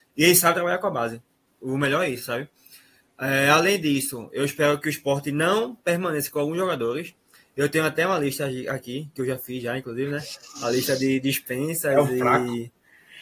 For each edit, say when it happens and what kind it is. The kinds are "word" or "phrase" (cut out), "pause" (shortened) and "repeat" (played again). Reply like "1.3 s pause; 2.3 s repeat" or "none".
none